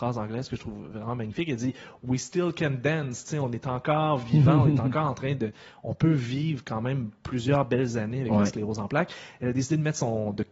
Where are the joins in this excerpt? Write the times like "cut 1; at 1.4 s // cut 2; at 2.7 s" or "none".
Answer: none